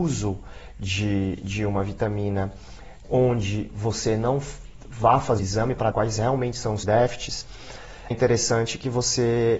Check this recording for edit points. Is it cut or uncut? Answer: cut